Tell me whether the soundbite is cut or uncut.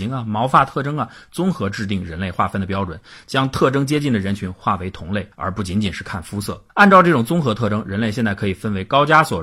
cut